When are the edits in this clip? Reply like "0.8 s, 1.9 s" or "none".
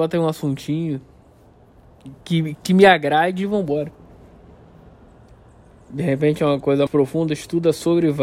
2.2 s, 2.5 s, 6.9 s